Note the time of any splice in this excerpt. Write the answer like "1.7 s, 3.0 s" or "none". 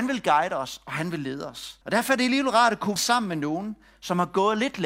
1.8 s, 3.0 s